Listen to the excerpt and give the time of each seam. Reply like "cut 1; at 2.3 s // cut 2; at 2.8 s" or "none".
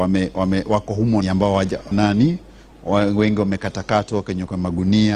cut 1; at 1.2 s // cut 2; at 1.9 s